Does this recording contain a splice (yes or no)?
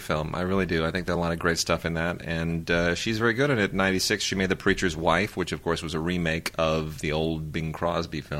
no